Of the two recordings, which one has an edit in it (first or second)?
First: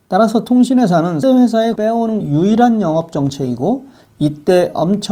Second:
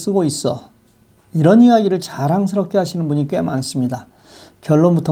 first